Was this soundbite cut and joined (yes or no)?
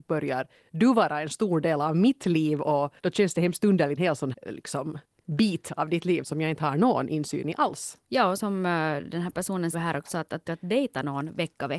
yes